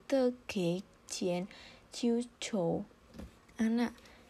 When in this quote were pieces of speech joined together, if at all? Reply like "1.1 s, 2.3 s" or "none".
3.4 s